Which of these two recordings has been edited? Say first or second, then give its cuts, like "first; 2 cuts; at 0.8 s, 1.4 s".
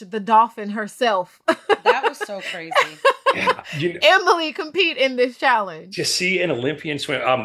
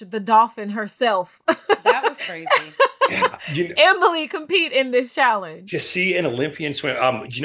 second; 1 cut; at 2.2 s